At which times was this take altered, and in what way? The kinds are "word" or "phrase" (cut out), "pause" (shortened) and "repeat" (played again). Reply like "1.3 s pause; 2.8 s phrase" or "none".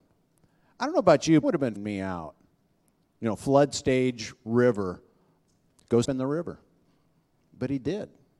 1.4 s phrase; 1.7 s word; 6.0 s word